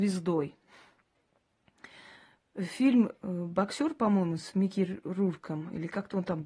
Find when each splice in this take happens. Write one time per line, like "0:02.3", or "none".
none